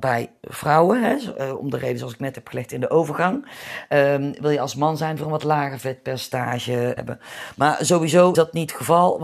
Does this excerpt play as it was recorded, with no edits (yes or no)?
no